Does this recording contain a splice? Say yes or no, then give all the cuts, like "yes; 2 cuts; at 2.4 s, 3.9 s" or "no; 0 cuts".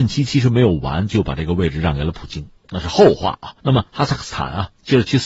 yes; 2 cuts; at 2.6 s, 3.6 s